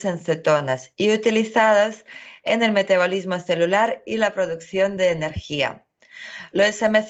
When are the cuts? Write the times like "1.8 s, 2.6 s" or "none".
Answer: none